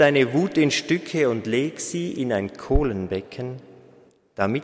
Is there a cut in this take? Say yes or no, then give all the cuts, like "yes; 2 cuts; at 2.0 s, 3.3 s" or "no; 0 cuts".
no; 0 cuts